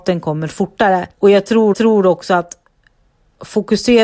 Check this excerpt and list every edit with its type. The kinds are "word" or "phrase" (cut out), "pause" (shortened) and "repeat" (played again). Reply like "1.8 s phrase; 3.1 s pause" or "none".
1.1 s pause; 1.7 s repeat

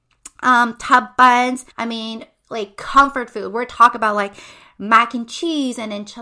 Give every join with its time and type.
1.7 s pause

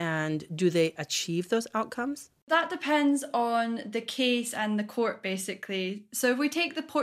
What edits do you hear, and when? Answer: none

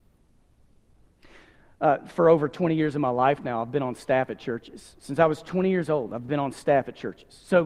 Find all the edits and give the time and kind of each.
none

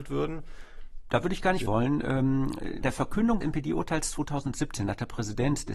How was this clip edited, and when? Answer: 1.7 s word; 2.8 s word; 3.4 s word

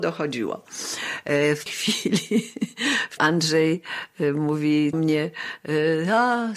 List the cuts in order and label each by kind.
1.7 s word; 3.2 s phrase; 4.9 s phrase

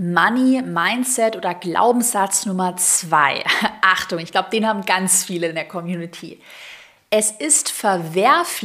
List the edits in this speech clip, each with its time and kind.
none

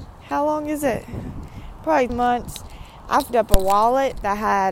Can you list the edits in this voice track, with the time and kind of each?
2.1 s word; 3.3 s word

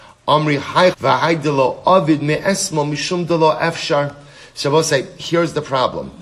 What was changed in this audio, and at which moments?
0.9 s word

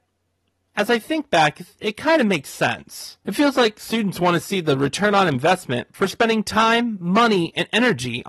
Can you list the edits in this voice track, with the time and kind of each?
3.2 s pause

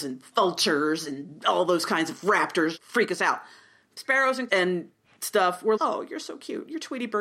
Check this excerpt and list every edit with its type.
2.8 s word; 4.5 s word; 5.8 s word

